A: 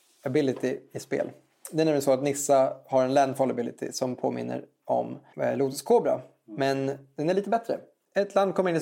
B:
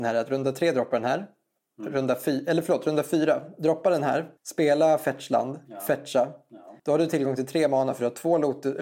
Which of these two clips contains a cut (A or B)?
B